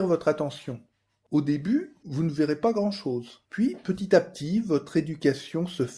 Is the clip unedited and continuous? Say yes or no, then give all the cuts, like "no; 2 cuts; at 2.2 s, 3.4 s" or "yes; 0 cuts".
yes; 0 cuts